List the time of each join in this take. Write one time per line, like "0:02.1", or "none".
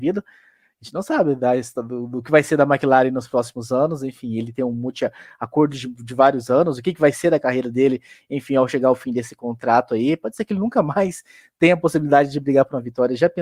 none